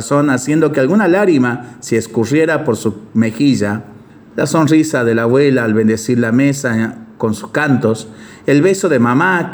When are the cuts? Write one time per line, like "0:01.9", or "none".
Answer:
0:04.1